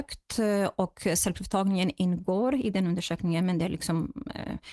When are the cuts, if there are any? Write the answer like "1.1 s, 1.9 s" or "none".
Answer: none